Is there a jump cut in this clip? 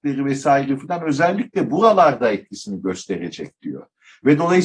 no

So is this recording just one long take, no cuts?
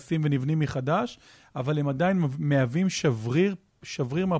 yes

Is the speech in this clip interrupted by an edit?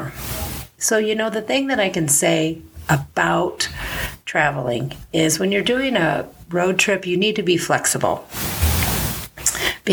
no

